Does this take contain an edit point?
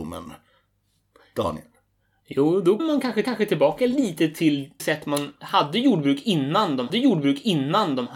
yes; 4 cuts; at 2.8 s, 3.2 s, 4.8 s, 6.9 s

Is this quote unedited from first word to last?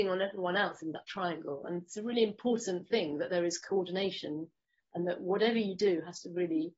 yes; 0 cuts

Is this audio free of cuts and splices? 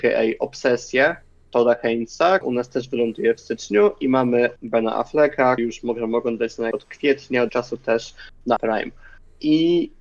no; 6 cuts; at 2.4 s, 4.6 s, 5.6 s, 6.7 s, 7.5 s, 8.6 s

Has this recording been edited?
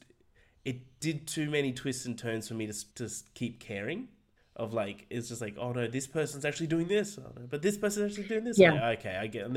yes; 2 cuts; at 2.9 s, 4.4 s

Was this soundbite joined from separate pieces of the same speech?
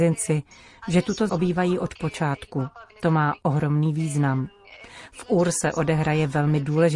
yes; 2 cuts; at 1.3 s, 2.9 s

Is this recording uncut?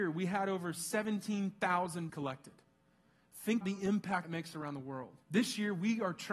no; 4 cuts; at 2.1 s, 3.6 s, 4.2 s, 5.2 s

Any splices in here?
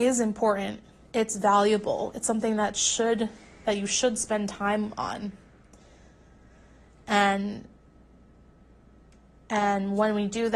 no; 0 cuts

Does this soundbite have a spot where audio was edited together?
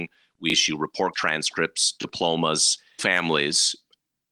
yes; 2 cuts; at 1.1 s, 3.0 s

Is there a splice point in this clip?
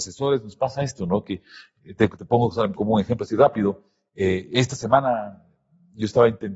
yes; 1 cut; at 2.8 s

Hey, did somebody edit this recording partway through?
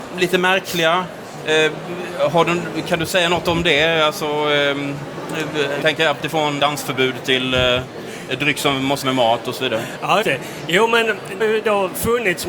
yes; 6 cuts; at 5.8 s, 6.2 s, 6.6 s, 9.0 s, 10.2 s, 11.4 s

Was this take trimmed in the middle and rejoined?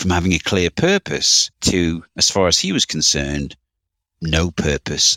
yes; 1 cut; at 1.5 s

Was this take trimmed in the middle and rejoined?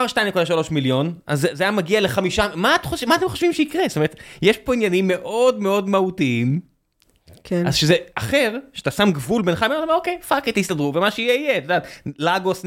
no; 0 cuts

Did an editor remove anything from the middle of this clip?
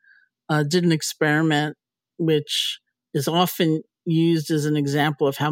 no; 0 cuts

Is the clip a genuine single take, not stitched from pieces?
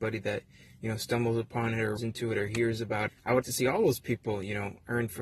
no; 3 cuts; at 2.0 s, 3.1 s, 3.4 s

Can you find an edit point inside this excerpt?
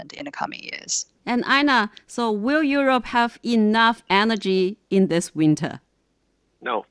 no; 0 cuts

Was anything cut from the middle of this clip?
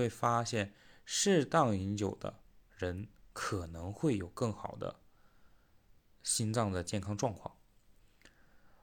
no; 0 cuts

